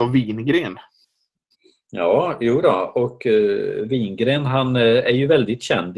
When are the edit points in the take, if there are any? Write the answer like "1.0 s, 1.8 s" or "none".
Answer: none